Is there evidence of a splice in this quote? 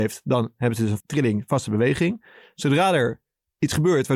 yes; 1 cut; at 1.0 s

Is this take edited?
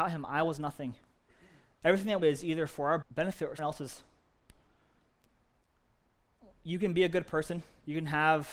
yes; 3 cuts; at 2.2 s, 3.0 s, 3.6 s

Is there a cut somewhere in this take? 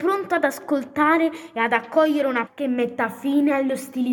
yes; 1 cut; at 2.5 s

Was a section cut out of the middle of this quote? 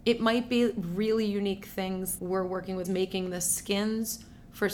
yes; 2 cuts; at 2.2 s, 2.8 s

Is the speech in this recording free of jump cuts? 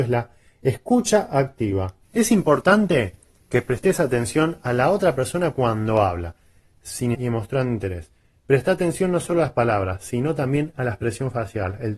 no; 2 cuts; at 2.0 s, 7.1 s

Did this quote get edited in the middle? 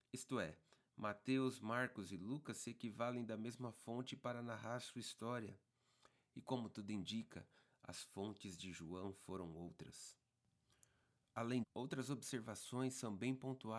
yes; 1 cut; at 11.6 s

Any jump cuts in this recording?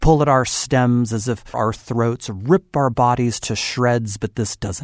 yes; 1 cut; at 1.5 s

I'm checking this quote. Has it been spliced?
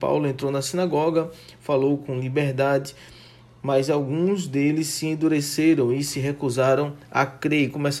no; 0 cuts

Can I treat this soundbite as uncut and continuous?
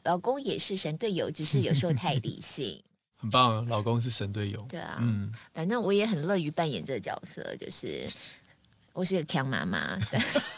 yes; 0 cuts

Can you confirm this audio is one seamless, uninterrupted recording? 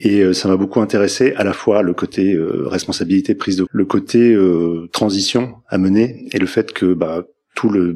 no; 1 cut; at 3.7 s

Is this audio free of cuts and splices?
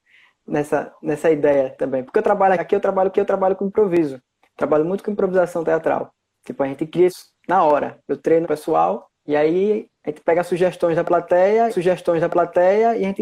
no; 6 cuts; at 2.6 s, 3.1 s, 7.1 s, 8.4 s, 9.2 s, 11.7 s

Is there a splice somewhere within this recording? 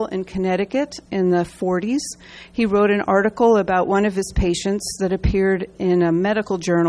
no; 0 cuts

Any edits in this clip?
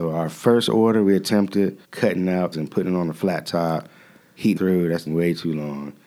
yes; 4 cuts; at 1.8 s, 2.5 s, 4.6 s, 5.1 s

